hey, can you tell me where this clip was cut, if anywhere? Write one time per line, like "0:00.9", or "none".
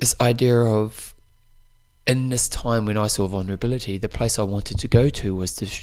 0:01.4